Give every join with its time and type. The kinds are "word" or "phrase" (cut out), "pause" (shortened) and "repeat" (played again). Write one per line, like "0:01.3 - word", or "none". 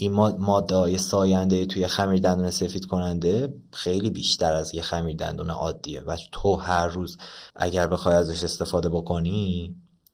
0:07.5 - pause